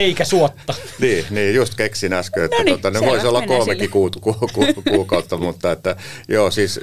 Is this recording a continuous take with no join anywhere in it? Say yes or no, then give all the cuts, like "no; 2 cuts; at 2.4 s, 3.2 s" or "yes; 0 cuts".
yes; 0 cuts